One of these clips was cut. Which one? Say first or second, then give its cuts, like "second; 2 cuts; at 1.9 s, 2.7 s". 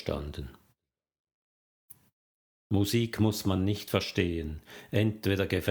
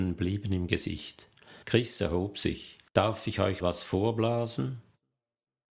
second; 3 cuts; at 1.6 s, 2.9 s, 3.6 s